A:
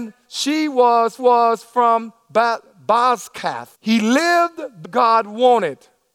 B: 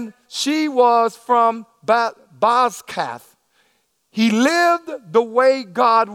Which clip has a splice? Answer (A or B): A